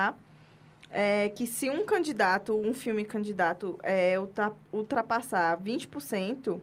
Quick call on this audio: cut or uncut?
uncut